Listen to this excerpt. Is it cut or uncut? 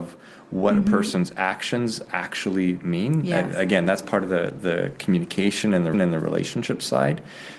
cut